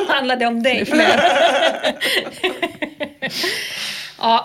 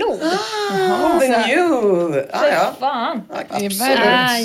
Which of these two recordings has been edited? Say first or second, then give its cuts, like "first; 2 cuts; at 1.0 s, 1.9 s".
second; 2 cuts; at 1.2 s, 3.5 s